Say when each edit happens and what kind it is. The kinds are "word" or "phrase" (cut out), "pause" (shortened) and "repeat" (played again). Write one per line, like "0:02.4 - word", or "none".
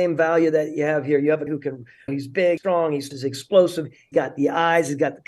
0:01.5 - word
0:02.1 - word
0:02.6 - word
0:03.1 - word
0:04.1 - word